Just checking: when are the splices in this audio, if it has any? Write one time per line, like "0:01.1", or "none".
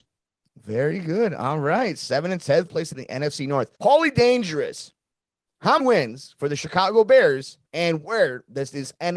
0:02.7
0:03.7
0:05.8
0:07.7